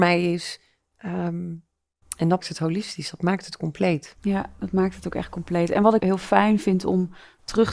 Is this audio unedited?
no; 2 cuts; at 2.4 s, 6.0 s

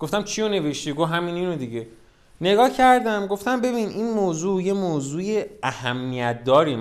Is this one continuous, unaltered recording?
yes; 0 cuts

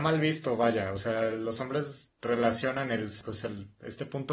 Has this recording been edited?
no; 0 cuts

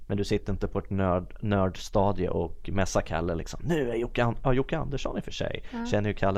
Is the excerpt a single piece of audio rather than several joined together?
yes; 0 cuts

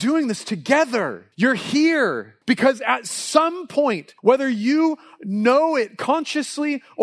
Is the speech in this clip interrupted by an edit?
yes; 3 cuts; at 1.3 s, 2.4 s, 4.2 s

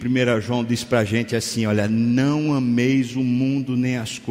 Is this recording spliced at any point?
no; 0 cuts

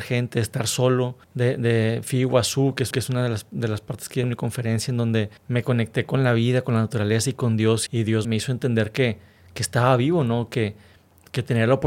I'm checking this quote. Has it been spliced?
yes; 6 cuts; at 1.2 s, 2.9 s, 4.2 s, 5.4 s, 7.9 s, 8.2 s

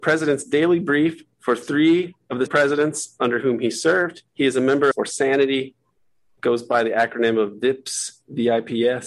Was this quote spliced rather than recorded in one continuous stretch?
yes; 3 cuts; at 2.5 s, 4.3 s, 4.9 s

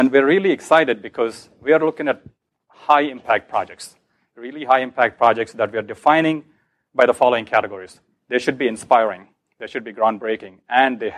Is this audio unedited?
yes; 0 cuts

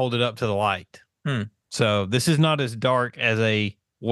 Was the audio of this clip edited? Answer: yes; 1 cut; at 1.6 s

